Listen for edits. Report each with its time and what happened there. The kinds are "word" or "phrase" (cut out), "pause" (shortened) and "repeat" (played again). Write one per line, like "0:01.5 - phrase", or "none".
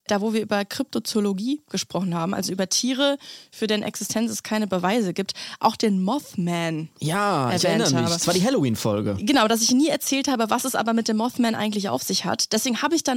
none